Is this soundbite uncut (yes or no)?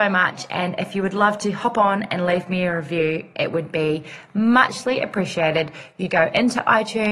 no